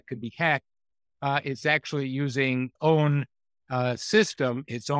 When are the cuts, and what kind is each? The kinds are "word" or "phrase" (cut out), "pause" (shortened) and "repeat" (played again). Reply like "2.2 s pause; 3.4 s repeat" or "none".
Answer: 2.8 s word